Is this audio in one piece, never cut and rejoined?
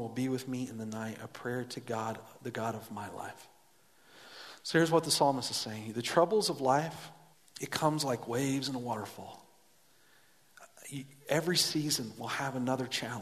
no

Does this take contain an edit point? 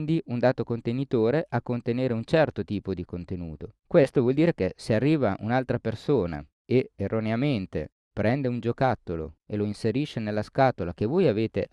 yes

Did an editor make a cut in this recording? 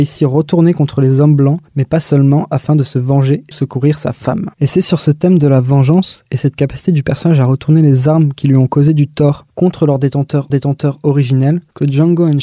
yes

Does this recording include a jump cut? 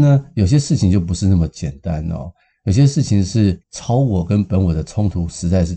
yes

